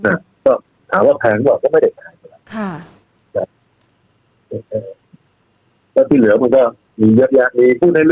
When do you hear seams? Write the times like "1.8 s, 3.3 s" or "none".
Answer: none